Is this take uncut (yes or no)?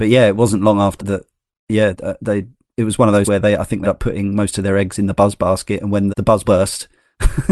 no